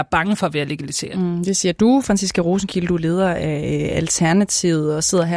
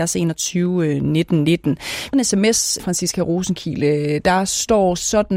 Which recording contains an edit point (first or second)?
second